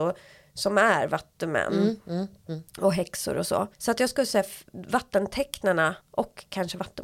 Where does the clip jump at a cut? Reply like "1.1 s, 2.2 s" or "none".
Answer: 3.7 s, 6.0 s